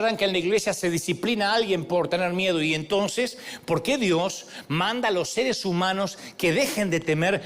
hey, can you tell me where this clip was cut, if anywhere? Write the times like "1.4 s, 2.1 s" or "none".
none